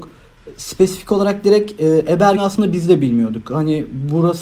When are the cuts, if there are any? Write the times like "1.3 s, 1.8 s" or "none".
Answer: 2.4 s